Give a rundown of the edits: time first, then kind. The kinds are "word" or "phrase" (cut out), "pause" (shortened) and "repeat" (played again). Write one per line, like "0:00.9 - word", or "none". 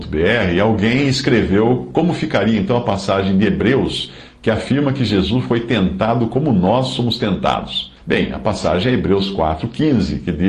0:08.0 - pause